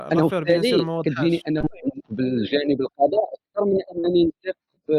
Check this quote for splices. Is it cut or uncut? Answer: cut